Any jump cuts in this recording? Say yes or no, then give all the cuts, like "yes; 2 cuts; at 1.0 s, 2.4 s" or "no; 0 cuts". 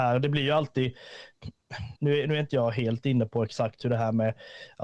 yes; 1 cut; at 2.0 s